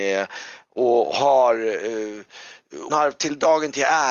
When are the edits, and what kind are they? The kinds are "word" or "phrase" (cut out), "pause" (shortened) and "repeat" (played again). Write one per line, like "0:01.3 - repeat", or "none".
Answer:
0:02.9 - word